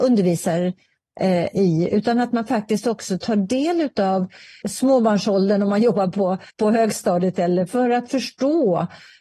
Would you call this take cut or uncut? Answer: cut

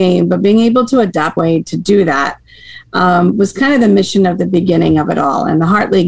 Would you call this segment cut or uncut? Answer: cut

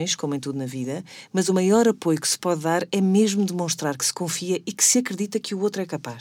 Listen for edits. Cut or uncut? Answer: uncut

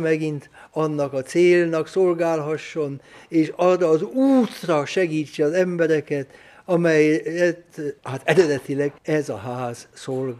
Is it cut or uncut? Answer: cut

